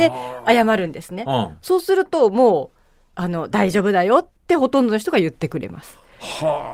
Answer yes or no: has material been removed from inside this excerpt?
yes